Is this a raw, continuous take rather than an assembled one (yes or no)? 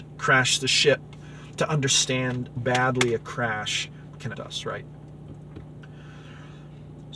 no